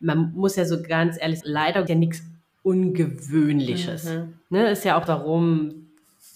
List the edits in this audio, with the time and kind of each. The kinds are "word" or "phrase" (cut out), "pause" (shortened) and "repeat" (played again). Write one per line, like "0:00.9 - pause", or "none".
0:01.4 - word
0:01.9 - phrase
0:05.1 - word